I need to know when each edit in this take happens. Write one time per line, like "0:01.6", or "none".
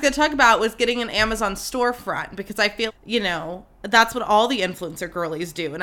0:02.9